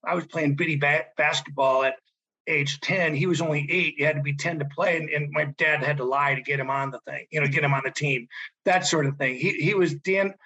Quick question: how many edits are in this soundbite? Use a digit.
0